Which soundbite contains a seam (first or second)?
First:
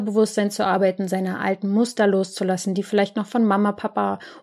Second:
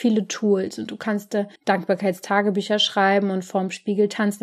second